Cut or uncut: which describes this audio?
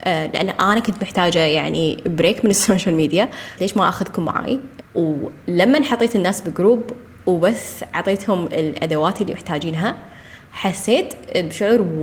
cut